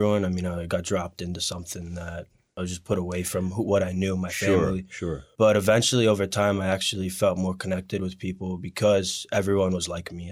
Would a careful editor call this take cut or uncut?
uncut